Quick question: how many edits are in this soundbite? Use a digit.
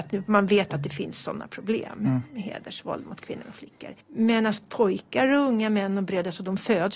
1